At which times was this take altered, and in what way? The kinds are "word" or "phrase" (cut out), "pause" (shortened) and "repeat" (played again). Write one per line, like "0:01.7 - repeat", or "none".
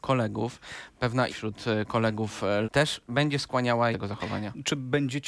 0:01.3 - word
0:02.6 - word
0:03.9 - phrase